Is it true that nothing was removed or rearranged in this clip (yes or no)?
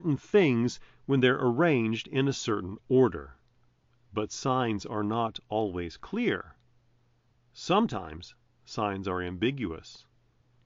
yes